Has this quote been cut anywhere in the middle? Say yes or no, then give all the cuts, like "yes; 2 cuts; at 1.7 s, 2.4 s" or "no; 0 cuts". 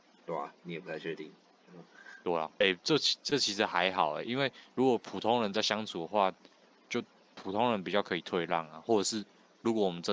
yes; 1 cut; at 2.6 s